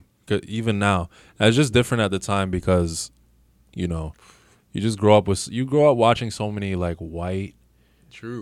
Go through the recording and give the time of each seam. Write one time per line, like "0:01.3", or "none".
none

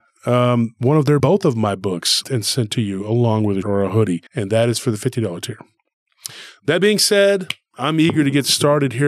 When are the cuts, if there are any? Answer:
0:01.2
0:02.2
0:03.6
0:04.3

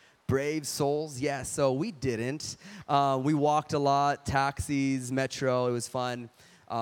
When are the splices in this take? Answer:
none

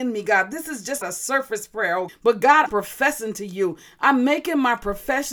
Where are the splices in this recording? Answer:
0:01.0
0:02.1
0:02.7

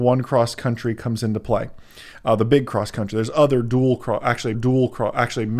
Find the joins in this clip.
0:04.5

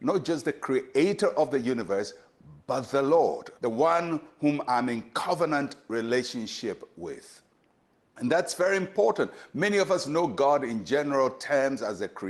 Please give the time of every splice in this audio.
0:03.6

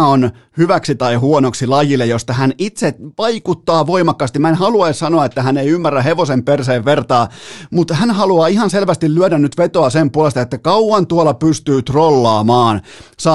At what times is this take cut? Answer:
none

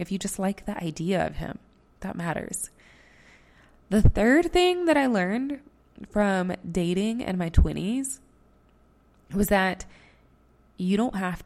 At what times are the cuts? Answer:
none

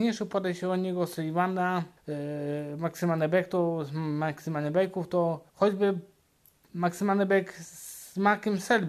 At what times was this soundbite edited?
0:02.0
0:05.5

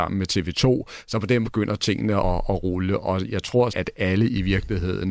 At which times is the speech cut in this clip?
0:01.4
0:02.2
0:03.7

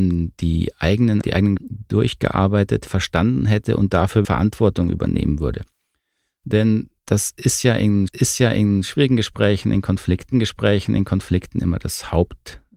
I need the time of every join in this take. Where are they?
0:01.2
0:01.6
0:02.9
0:04.2
0:07.0
0:08.1
0:10.3

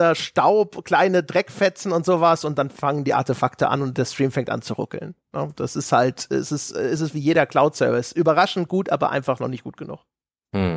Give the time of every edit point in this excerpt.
none

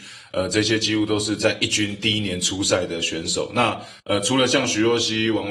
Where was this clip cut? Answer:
0:04.0

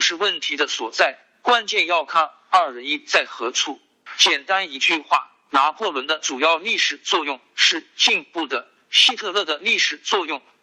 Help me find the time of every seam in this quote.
none

